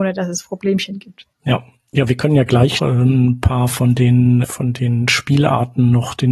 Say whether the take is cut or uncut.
cut